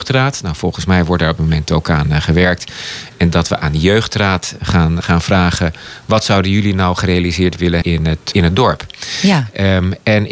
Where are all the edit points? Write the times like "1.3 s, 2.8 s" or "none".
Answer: 1.4 s, 5.0 s, 7.8 s, 8.3 s